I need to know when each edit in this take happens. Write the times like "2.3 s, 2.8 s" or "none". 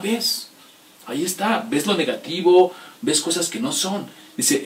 none